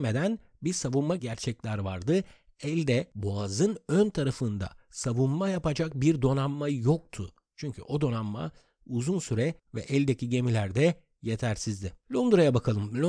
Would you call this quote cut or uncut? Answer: cut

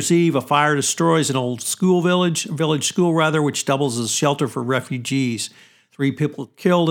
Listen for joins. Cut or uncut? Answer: uncut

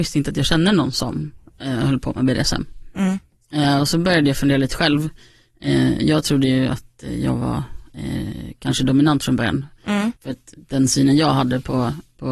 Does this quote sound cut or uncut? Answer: cut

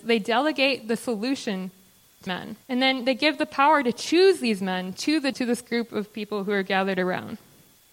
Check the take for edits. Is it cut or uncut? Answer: cut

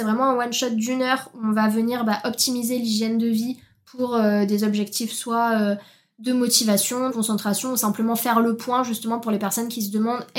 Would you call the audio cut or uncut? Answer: cut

